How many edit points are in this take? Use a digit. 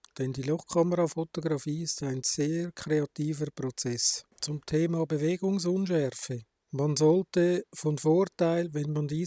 1